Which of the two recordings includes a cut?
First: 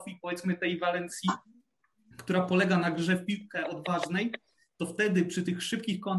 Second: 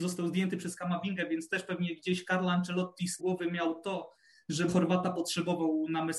second; 2 cuts; at 3.2 s, 4.7 s

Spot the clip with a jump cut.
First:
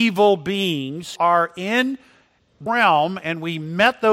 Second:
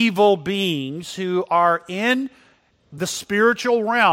first; 2 cuts; at 1.2 s, 2.7 s

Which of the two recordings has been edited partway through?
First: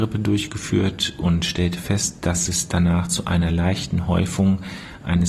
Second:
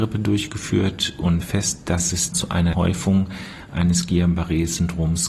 second; 3 cuts; at 1.4 s, 2.3 s, 2.7 s

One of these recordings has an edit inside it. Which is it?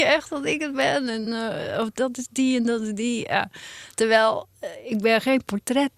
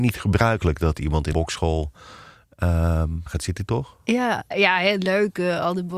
second; 4 cuts; at 1.3 s, 3.3 s, 3.7 s, 4.5 s

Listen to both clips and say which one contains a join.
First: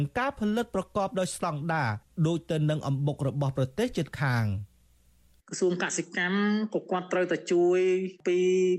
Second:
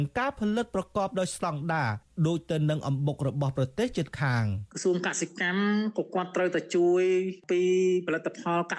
second; 1 cut; at 4.7 s

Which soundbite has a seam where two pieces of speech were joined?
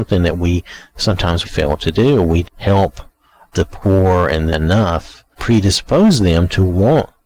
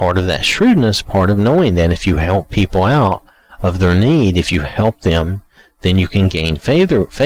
first; 5 cuts; at 1.4 s, 2.4 s, 3.5 s, 4.5 s, 5.3 s

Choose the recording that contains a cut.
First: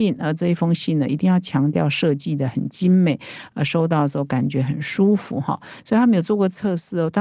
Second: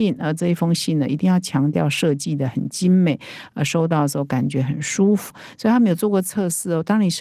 second; 1 cut; at 5.3 s

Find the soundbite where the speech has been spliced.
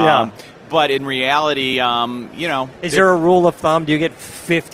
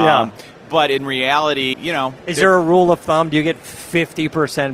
second; 1 cut; at 1.7 s

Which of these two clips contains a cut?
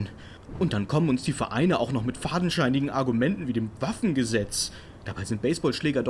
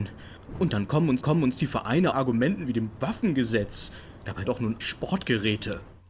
second; 4 cuts; at 1.2 s, 2.1 s, 4.4 s, 4.8 s

